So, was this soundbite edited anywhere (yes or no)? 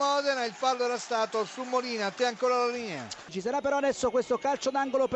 no